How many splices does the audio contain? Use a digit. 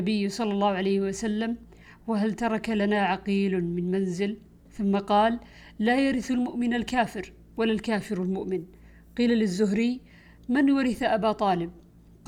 0